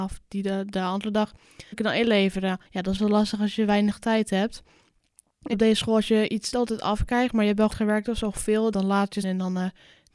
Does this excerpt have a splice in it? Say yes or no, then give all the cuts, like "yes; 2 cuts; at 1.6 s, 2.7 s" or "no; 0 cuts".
yes; 8 cuts; at 1.7 s, 2.7 s, 3.0 s, 5.5 s, 6.5 s, 7.7 s, 8.7 s, 9.2 s